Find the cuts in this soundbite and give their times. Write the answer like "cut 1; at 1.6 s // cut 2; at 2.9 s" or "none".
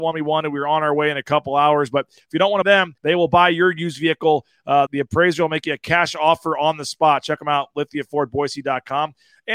cut 1; at 2.6 s // cut 2; at 3.0 s // cut 3; at 4.9 s